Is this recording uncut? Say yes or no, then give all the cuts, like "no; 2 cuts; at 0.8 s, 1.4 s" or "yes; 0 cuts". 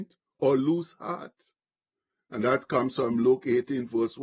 yes; 0 cuts